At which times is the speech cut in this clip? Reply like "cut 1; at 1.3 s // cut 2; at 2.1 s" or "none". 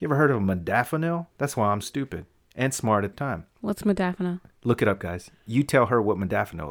cut 1; at 1.3 s // cut 2; at 1.8 s // cut 3; at 3.1 s